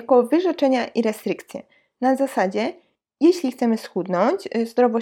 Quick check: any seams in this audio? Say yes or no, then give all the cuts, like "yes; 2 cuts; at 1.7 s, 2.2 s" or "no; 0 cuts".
no; 0 cuts